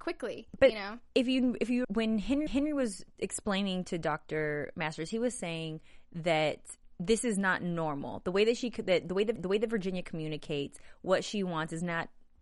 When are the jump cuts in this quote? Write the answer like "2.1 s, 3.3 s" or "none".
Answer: 1.8 s, 2.5 s, 9.4 s